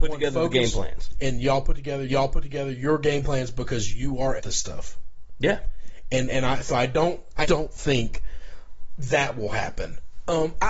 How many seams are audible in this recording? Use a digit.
3